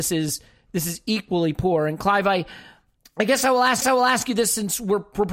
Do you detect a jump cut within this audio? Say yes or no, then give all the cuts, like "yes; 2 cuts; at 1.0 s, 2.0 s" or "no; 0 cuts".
yes; 2 cuts; at 3.0 s, 3.8 s